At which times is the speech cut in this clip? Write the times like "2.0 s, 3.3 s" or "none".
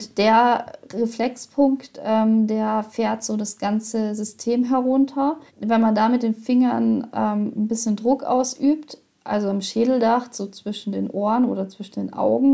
5.5 s